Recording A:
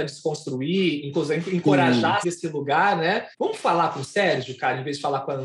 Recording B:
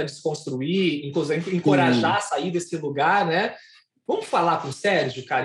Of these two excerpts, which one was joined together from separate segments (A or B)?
A